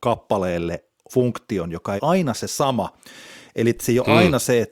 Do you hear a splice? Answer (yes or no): yes